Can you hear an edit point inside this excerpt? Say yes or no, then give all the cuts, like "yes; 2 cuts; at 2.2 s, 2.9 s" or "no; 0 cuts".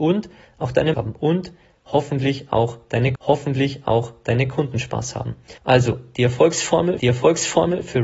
yes; 4 cuts; at 0.9 s, 3.2 s, 5.6 s, 7.0 s